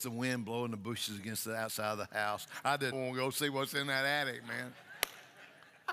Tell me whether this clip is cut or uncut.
cut